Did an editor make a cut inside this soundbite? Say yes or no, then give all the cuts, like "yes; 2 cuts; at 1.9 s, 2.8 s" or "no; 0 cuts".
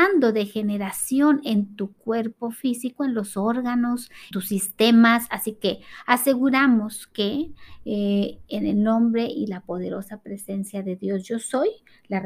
yes; 1 cut; at 4.3 s